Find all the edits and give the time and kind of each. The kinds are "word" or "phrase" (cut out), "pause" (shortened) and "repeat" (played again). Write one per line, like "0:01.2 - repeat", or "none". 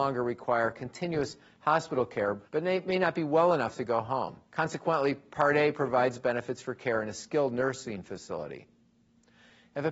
0:02.4 - pause
0:04.4 - pause